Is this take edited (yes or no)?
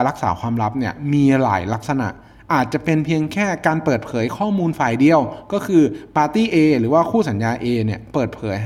no